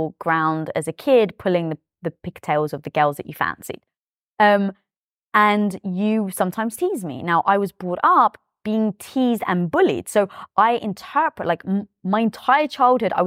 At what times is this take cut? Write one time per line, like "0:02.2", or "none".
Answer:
none